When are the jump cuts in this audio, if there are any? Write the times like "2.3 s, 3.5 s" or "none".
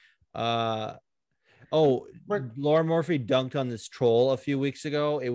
none